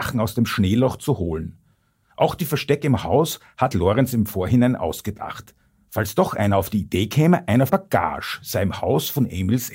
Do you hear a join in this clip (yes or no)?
yes